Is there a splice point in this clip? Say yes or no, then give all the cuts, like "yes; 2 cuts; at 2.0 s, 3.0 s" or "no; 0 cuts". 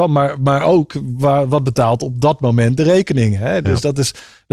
no; 0 cuts